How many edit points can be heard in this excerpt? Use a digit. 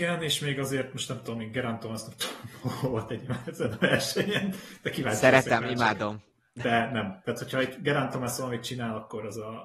0